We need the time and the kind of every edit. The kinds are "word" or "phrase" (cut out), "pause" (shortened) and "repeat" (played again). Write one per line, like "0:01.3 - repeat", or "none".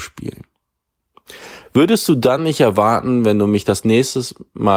none